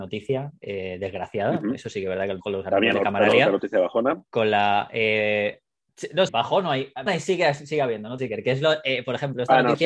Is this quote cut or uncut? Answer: cut